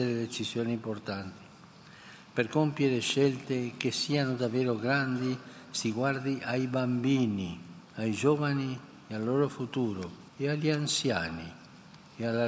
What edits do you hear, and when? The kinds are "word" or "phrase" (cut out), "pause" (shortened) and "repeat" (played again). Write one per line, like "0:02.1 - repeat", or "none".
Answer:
0:07.8 - pause
0:10.3 - pause